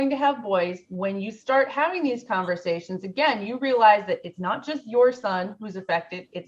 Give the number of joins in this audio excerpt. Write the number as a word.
zero